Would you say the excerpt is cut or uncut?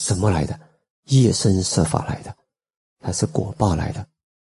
uncut